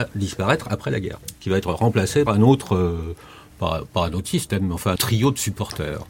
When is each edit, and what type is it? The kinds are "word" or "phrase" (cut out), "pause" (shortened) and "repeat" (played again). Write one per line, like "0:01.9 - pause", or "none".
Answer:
0:01.3 - pause
0:02.3 - word
0:05.0 - word